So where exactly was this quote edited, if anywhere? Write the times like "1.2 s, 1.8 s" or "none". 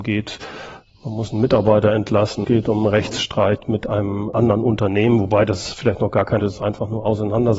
2.4 s, 6.4 s